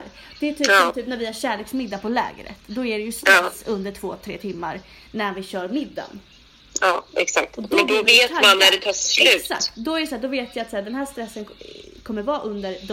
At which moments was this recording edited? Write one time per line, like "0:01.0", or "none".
none